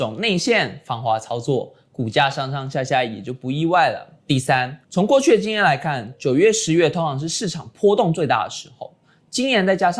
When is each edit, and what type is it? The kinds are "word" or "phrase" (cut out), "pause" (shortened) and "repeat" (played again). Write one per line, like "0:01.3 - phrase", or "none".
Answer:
0:04.2 - pause
0:04.8 - pause